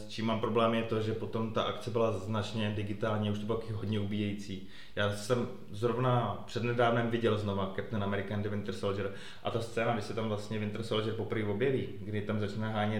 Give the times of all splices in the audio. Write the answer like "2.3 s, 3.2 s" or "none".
none